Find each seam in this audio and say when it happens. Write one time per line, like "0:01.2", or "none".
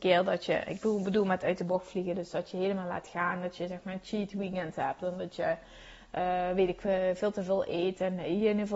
none